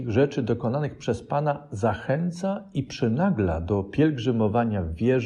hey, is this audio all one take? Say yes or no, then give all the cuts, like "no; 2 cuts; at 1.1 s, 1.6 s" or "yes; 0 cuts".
yes; 0 cuts